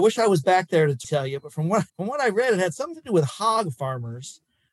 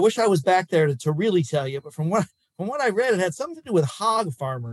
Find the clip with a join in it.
first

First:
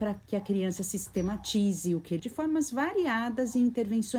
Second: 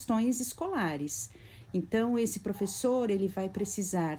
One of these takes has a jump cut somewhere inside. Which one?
first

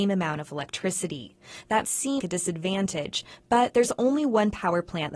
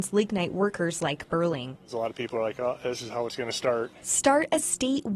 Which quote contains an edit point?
first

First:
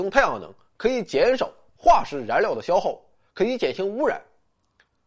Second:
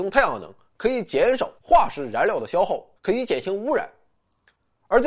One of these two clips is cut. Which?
second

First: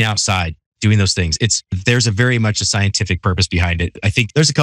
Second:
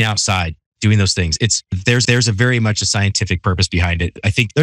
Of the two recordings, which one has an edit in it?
second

